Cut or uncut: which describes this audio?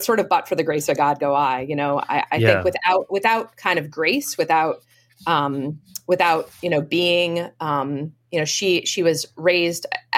uncut